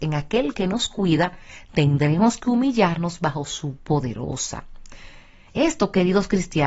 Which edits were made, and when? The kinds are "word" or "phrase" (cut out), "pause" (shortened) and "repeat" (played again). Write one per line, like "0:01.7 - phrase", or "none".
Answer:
0:03.8 - word